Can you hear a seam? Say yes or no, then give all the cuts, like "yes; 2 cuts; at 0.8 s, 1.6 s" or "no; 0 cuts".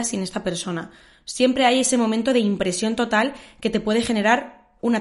no; 0 cuts